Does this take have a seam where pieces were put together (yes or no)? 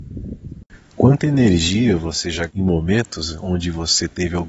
yes